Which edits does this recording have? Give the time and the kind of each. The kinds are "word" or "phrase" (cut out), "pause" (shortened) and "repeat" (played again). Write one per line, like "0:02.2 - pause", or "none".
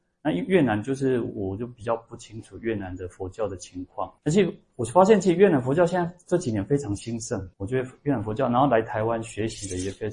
0:04.2 - pause
0:07.5 - pause